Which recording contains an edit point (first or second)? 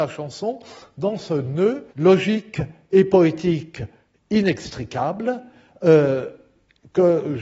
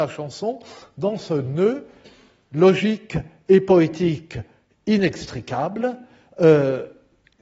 first